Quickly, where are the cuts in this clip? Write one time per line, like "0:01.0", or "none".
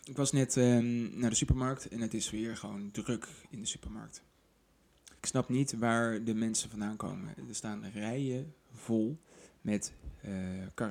0:05.2